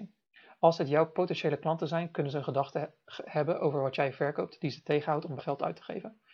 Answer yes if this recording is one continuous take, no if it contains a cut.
no